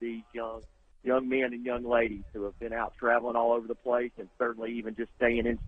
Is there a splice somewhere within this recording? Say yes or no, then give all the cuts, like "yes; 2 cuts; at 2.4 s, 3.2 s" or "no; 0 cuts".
yes; 1 cut; at 0.9 s